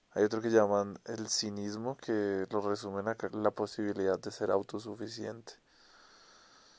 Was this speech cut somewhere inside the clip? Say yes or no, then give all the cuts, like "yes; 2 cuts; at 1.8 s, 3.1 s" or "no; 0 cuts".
yes; 1 cut; at 3.3 s